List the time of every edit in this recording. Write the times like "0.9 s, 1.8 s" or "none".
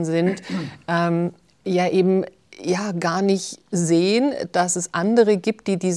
none